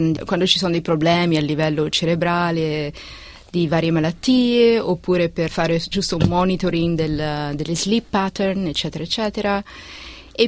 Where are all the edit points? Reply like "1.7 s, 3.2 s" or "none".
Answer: 5.5 s